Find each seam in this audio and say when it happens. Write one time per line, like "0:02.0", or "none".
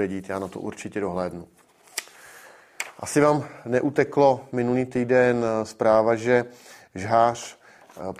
none

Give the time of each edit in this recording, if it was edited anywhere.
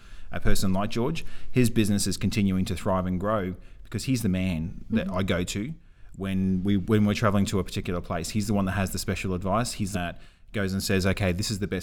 0:09.9

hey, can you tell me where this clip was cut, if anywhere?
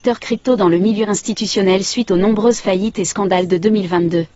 none

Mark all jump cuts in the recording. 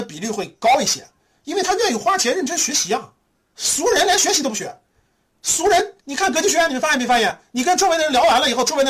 0:03.3
0:06.0

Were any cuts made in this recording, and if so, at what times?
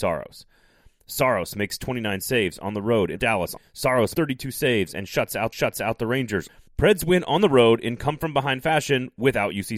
0:03.2
0:04.1
0:05.5

